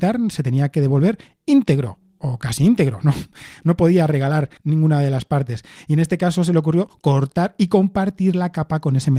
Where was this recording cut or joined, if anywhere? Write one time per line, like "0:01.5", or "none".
0:04.6

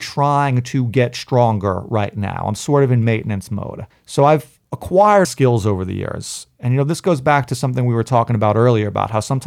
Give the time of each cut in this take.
0:03.9
0:05.2

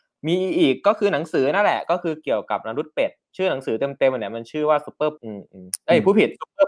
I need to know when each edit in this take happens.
0:05.2

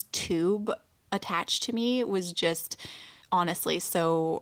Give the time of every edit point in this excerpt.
0:03.2

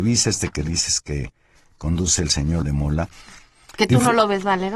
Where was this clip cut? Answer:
0:02.6

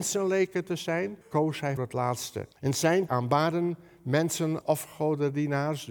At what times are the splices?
0:01.2
0:01.8
0:02.5
0:03.1
0:04.6

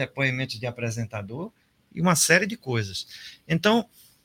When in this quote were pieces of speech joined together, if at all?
none

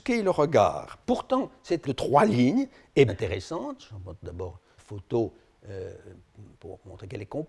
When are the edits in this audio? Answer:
0:01.0
0:01.8
0:03.1
0:04.8

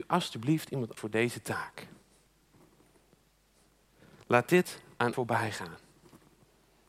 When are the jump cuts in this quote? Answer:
0:01.0
0:05.1

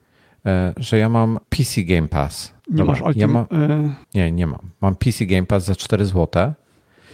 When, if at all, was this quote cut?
0:01.4
0:02.6
0:04.0

